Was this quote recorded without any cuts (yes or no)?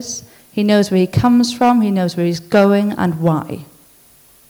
yes